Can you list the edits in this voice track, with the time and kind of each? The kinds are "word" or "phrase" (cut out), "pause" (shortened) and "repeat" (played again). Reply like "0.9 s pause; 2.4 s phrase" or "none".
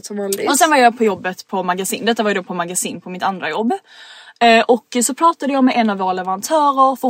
none